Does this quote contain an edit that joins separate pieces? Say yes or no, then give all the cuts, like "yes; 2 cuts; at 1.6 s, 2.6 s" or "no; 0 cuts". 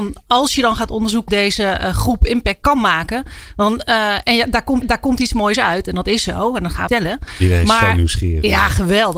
yes; 3 cuts; at 1.3 s, 4.8 s, 6.9 s